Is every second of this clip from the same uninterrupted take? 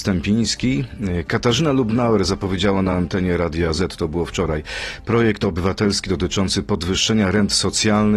yes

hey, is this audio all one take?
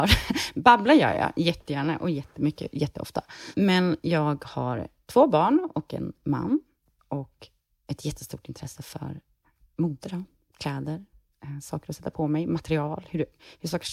yes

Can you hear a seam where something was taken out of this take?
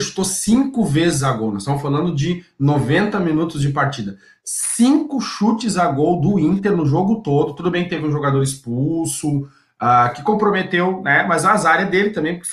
no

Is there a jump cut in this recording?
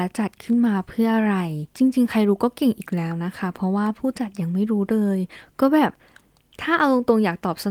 yes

